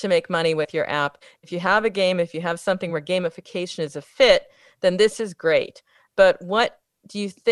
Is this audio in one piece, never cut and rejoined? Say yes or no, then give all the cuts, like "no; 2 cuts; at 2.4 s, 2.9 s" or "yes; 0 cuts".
yes; 0 cuts